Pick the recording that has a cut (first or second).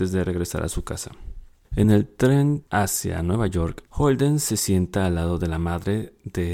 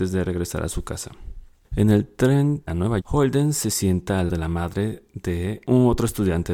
second